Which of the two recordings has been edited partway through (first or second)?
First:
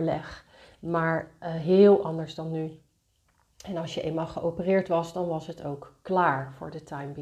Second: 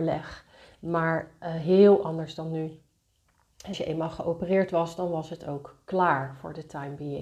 second